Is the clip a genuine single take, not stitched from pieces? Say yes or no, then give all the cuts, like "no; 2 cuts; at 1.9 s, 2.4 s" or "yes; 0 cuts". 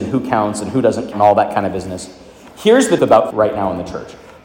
no; 3 cuts; at 1.1 s, 3.0 s, 3.3 s